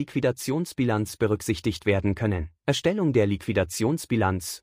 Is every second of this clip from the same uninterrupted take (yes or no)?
no